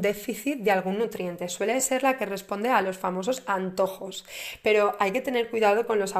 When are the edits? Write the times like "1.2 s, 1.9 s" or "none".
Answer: none